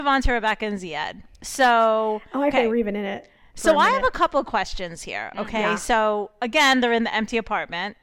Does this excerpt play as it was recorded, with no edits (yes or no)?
no